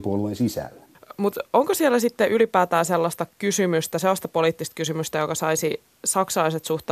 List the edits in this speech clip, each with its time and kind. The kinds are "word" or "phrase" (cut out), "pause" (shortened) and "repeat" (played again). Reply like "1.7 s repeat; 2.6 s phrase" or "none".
none